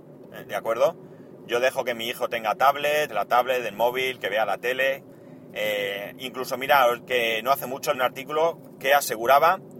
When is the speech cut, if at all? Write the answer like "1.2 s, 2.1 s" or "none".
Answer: 3.1 s, 7.0 s, 7.9 s